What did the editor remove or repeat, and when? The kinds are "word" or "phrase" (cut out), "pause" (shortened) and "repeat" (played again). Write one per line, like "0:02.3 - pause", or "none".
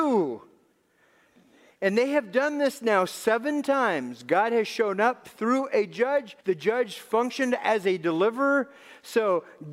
0:06.4 - pause